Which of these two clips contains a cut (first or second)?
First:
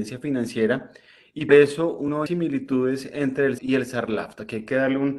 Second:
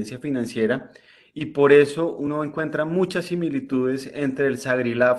first